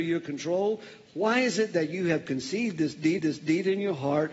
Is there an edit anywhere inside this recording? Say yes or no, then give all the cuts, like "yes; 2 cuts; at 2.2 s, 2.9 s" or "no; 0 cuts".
yes; 1 cut; at 3.2 s